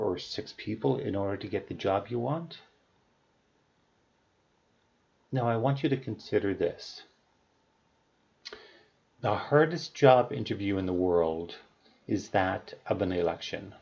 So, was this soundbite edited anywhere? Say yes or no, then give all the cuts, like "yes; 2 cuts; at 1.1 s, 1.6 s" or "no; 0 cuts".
no; 0 cuts